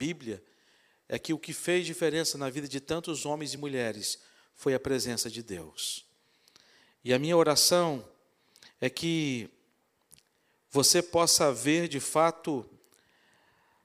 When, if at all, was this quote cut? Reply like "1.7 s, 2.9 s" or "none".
none